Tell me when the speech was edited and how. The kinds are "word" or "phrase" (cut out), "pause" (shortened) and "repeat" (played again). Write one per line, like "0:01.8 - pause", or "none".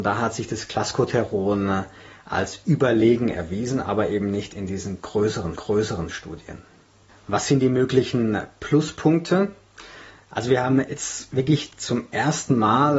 0:05.6 - repeat